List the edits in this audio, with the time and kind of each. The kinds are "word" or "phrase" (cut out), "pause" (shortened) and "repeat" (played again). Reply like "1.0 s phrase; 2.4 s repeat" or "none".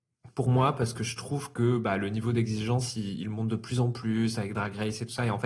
none